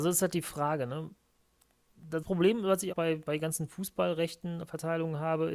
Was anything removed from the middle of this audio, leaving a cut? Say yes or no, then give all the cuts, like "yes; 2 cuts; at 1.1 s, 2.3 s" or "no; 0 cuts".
yes; 2 cuts; at 2.2 s, 2.9 s